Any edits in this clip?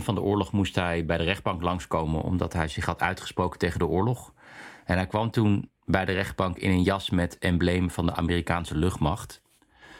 yes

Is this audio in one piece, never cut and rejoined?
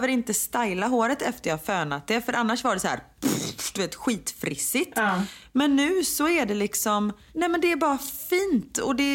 yes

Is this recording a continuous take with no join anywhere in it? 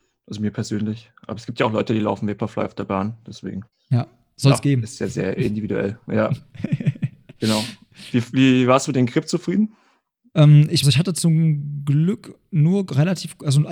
no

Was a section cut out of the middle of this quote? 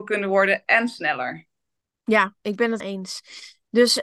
yes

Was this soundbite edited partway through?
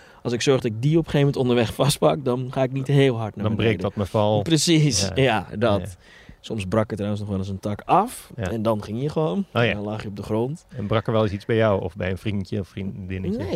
no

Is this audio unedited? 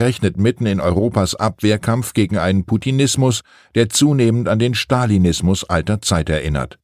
yes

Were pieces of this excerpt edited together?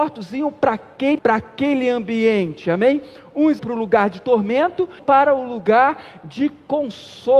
yes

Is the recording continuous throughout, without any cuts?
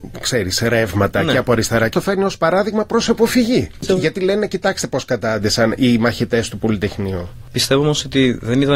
no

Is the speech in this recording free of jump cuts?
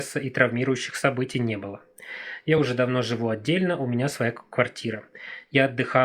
yes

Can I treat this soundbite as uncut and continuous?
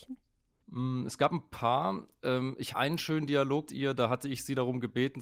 no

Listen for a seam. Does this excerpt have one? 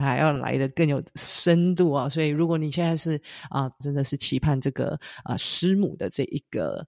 yes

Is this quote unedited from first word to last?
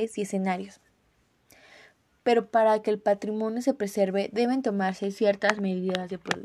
yes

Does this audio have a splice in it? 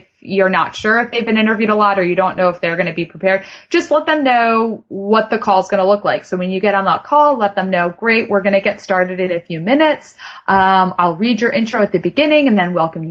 no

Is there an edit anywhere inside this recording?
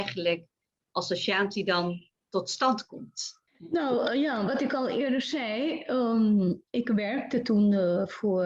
yes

